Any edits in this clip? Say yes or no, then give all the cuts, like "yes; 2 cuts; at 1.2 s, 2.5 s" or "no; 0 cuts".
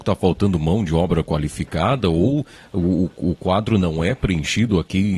no; 0 cuts